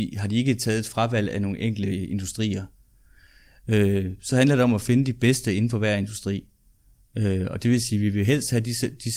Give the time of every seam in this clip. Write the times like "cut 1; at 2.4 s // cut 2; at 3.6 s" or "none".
none